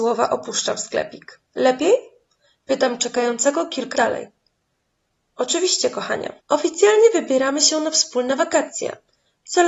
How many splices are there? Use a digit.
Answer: 4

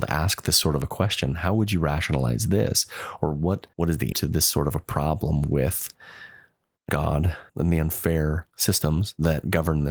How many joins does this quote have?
4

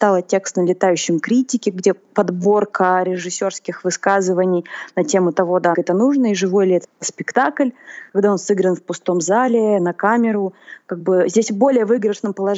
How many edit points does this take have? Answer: 2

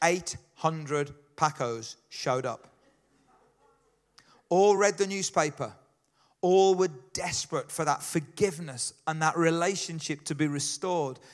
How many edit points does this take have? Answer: 0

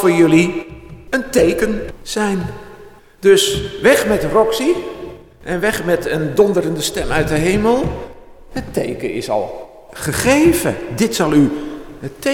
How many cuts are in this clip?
2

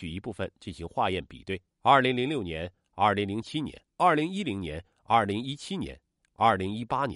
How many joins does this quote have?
2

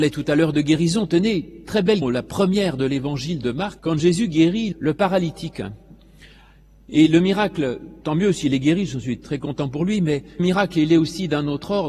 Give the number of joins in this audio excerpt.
5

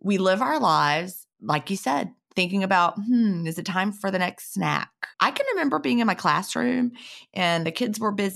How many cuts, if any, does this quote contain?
1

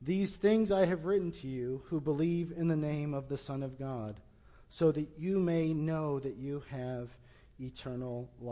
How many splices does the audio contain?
0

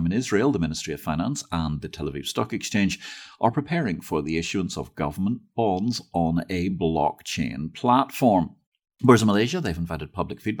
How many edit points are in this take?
0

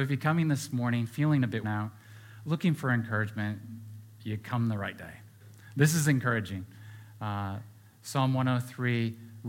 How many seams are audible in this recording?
1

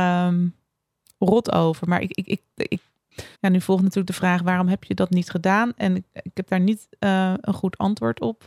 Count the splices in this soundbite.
1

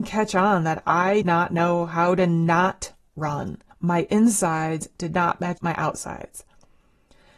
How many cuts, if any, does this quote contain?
3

